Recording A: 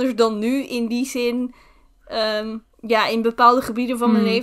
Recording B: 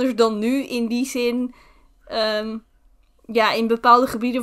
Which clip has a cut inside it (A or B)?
A